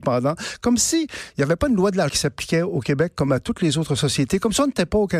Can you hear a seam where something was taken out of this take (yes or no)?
yes